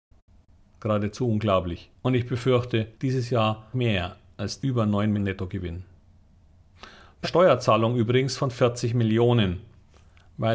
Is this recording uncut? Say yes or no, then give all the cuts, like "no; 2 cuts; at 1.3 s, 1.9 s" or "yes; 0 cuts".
no; 6 cuts; at 2.0 s, 2.9 s, 3.7 s, 4.6 s, 5.1 s, 7.2 s